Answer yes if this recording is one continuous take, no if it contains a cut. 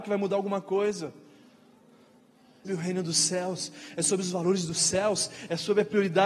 no